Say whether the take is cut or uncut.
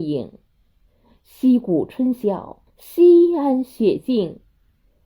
cut